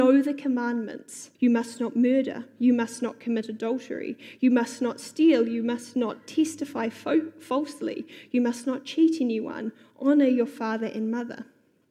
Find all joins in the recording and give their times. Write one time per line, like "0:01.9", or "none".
0:01.3